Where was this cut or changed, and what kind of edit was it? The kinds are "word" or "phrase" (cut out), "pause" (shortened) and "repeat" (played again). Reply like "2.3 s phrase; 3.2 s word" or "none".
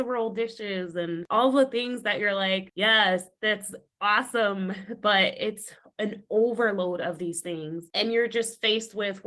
none